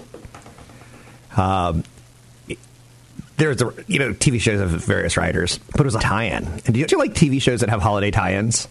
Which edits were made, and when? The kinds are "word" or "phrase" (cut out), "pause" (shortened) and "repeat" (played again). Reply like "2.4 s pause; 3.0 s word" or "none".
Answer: 3.3 s pause; 5.6 s pause; 6.0 s word; 6.9 s word